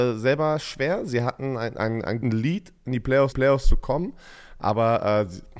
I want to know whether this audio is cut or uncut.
cut